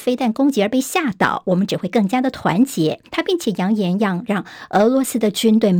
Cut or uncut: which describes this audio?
cut